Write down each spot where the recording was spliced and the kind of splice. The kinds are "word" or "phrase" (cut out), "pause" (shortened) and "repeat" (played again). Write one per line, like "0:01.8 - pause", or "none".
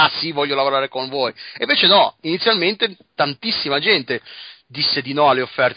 none